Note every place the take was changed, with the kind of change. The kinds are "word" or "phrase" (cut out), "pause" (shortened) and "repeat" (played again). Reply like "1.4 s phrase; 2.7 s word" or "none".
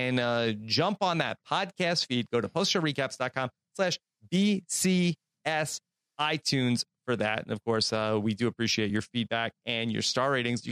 none

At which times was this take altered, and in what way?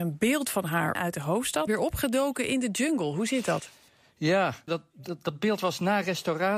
1.0 s word; 1.7 s word; 4.7 s word

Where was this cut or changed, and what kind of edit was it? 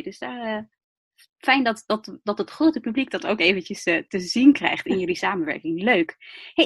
none

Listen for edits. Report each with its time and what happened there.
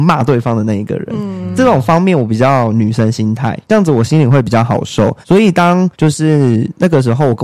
3.6 s pause; 5.2 s pause; 5.9 s pause

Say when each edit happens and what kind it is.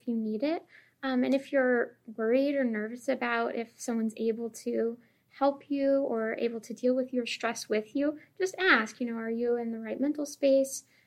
none

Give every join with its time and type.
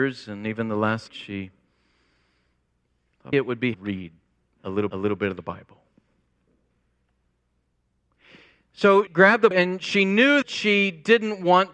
1.1 s word; 3.3 s word; 3.7 s phrase; 4.9 s repeat; 9.1 s word; 9.5 s word; 10.4 s word

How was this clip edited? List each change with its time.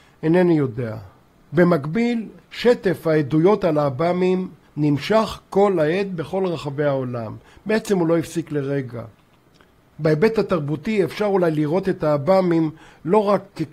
none

